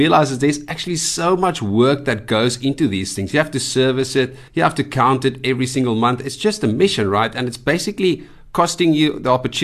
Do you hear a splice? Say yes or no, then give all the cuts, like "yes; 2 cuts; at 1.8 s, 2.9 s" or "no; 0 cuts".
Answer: yes; 1 cut; at 4.5 s